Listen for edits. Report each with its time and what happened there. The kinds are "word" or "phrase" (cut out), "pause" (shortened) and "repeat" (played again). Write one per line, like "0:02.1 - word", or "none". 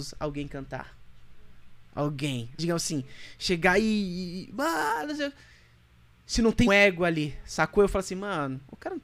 0:02.6 - word
0:06.7 - word